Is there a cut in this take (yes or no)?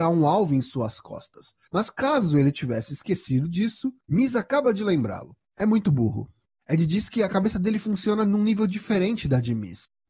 no